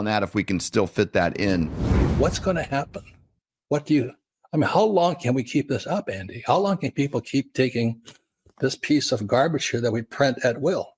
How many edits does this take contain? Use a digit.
0